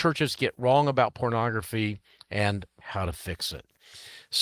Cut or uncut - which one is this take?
uncut